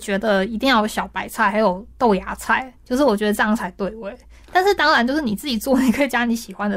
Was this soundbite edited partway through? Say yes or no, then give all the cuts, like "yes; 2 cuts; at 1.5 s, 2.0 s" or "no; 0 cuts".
yes; 2 cuts; at 1.9 s, 2.8 s